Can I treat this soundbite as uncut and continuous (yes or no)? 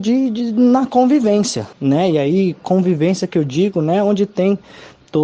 no